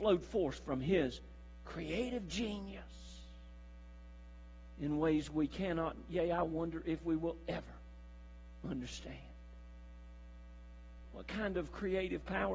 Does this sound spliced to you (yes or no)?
no